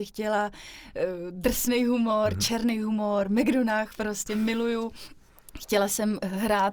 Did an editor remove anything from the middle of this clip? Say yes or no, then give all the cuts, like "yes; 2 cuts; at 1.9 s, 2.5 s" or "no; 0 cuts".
no; 0 cuts